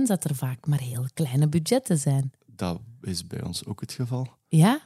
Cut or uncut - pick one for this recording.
uncut